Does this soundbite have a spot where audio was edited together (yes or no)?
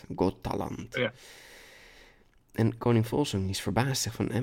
no